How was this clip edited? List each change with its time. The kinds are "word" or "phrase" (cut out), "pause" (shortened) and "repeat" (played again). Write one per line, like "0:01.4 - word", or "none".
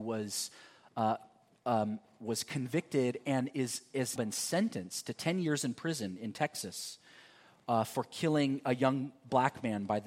0:04.2 - word